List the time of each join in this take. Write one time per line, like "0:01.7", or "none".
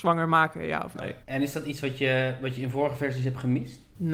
0:01.2